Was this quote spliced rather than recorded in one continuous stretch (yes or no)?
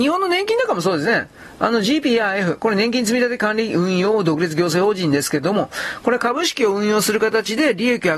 no